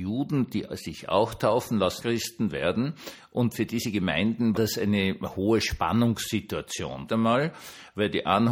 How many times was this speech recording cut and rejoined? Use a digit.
3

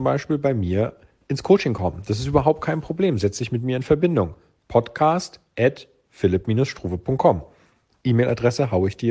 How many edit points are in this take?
0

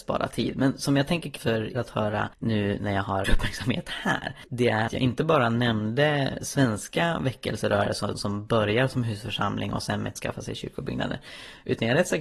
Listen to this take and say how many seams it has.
8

